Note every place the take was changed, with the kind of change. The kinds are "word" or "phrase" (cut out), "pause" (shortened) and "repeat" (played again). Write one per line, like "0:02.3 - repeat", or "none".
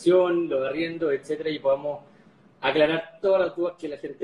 none